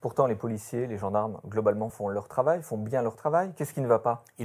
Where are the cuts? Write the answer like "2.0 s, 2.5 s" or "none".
none